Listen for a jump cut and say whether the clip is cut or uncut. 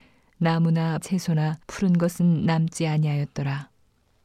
cut